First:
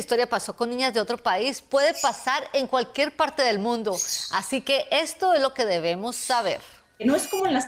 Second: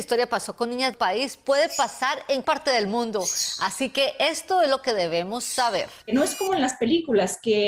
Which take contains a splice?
second; 3 cuts; at 0.9 s, 2.4 s, 6.0 s

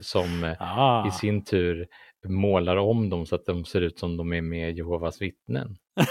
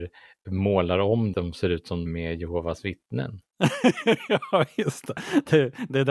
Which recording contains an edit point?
second; 2 cuts; at 1.3 s, 2.1 s

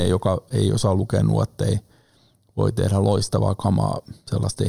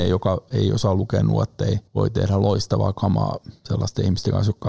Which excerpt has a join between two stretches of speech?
second; 1 cut; at 1.9 s

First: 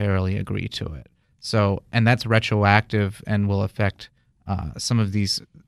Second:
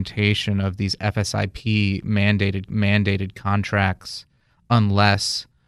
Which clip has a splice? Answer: second; 1 cut; at 2.7 s

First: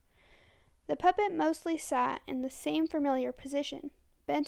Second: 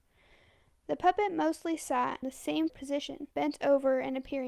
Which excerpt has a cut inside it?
second; 3 cuts; at 2.2 s, 2.7 s, 3.3 s

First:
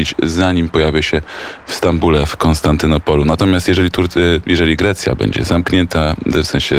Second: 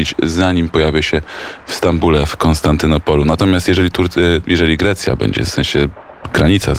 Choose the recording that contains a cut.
second; 1 cut; at 5.5 s

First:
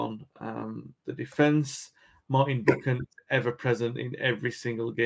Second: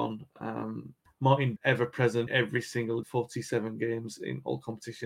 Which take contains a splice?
second; 4 cuts; at 1.1 s, 1.6 s, 2.3 s, 3.0 s

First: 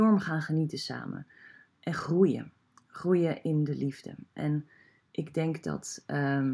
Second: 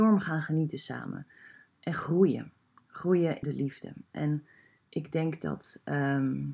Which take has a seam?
second; 1 cut; at 3.4 s

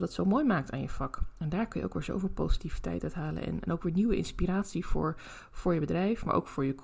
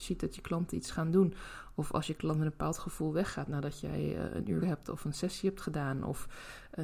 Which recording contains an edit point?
second; 1 cut; at 4.6 s

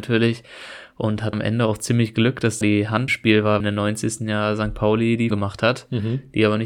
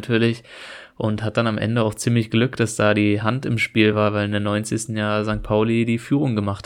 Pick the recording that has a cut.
first; 5 cuts; at 1.3 s, 2.6 s, 3.1 s, 3.6 s, 5.3 s

